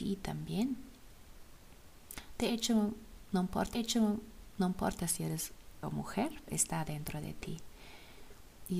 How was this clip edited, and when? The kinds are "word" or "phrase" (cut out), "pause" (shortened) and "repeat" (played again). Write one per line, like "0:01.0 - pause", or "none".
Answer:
0:03.7 - repeat
0:05.8 - word
0:06.5 - word

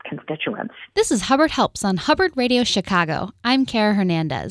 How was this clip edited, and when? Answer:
0:00.9 - pause

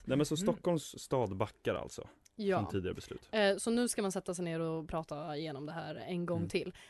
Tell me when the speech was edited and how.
none

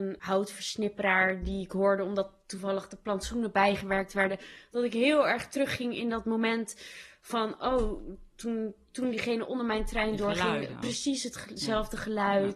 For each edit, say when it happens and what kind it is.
none

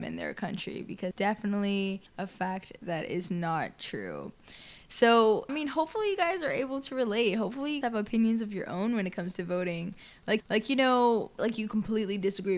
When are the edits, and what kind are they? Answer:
0:01.1 - word
0:02.1 - pause
0:05.5 - phrase
0:07.8 - word
0:10.4 - repeat
0:11.4 - word

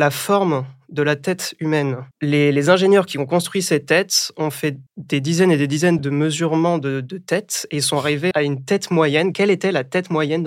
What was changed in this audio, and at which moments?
0:02.1 - pause
0:04.9 - pause
0:06.0 - word
0:08.3 - word

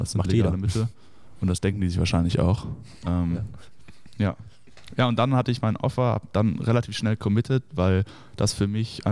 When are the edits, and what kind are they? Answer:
none

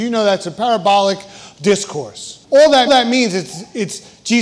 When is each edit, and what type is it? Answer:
0:02.4 - pause
0:02.9 - repeat

